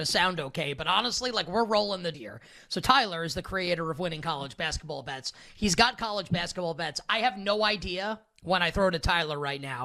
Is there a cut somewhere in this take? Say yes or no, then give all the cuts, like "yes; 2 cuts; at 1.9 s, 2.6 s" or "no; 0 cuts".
yes; 1 cut; at 2.1 s